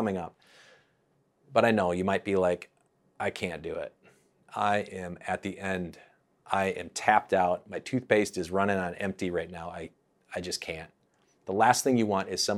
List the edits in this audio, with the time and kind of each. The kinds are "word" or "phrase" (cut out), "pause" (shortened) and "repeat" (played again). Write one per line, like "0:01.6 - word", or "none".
none